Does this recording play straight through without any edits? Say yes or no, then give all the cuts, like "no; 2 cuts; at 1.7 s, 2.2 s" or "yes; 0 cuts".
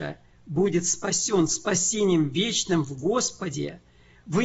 yes; 0 cuts